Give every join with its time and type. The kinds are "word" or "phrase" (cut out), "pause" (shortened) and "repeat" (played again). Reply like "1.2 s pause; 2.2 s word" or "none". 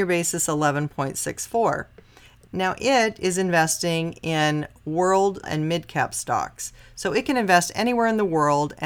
5.4 s word